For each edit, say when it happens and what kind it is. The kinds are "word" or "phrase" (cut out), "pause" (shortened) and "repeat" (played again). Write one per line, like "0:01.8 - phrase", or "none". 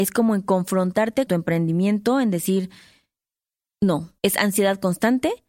0:01.3 - word
0:04.2 - pause